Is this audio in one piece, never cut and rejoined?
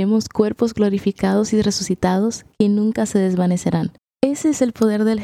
no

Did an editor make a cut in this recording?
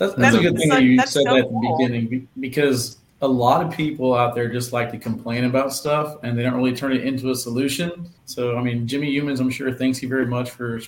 yes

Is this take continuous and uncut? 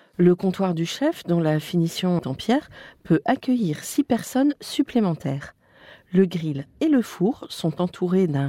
no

